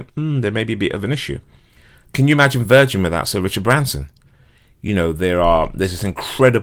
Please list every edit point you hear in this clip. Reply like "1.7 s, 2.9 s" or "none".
none